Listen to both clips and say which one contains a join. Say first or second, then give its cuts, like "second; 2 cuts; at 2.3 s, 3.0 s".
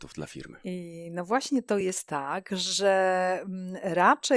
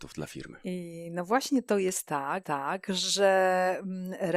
second; 1 cut; at 2.4 s